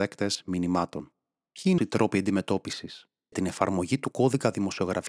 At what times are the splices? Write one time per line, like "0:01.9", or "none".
0:01.8
0:03.3